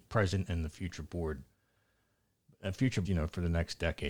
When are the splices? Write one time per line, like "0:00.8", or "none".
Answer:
0:03.0